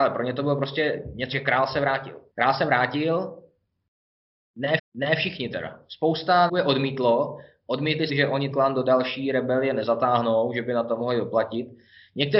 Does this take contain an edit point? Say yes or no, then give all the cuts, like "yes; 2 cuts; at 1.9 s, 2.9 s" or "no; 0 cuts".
yes; 6 cuts; at 1.3 s, 2.3 s, 4.8 s, 6.5 s, 8.1 s, 8.5 s